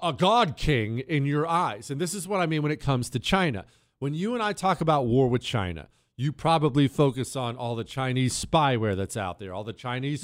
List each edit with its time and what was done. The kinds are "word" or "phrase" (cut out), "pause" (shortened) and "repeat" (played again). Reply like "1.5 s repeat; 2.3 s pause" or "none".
none